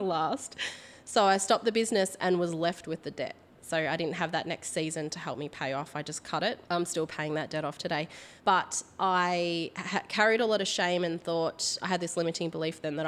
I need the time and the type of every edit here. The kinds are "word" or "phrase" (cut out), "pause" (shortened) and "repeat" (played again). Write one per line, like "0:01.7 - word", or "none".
0:06.6 - pause
0:08.4 - pause